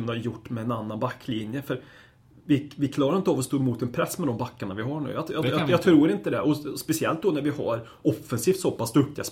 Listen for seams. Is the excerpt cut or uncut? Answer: uncut